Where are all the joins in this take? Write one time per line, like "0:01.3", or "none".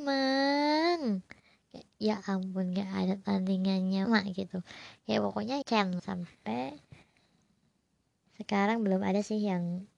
0:04.0
0:05.6
0:06.0